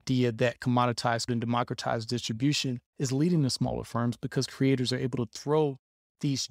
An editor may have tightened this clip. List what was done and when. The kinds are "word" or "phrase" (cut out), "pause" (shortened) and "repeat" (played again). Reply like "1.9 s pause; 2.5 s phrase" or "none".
1.3 s word; 2.9 s pause